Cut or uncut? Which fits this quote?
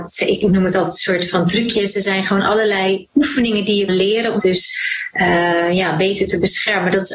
cut